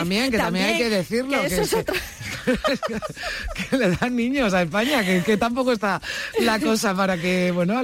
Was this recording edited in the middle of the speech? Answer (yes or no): no